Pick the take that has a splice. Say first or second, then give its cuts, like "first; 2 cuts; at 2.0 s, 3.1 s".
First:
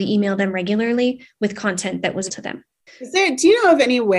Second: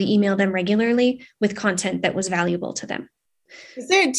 first; 2 cuts; at 2.3 s, 2.9 s